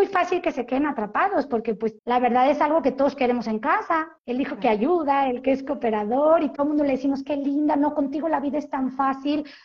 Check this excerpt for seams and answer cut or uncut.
cut